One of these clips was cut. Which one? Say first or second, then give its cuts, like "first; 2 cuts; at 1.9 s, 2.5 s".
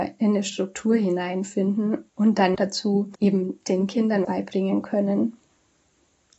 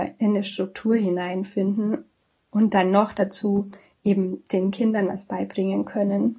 first; 4 cuts; at 2.1 s, 2.5 s, 3.2 s, 4.2 s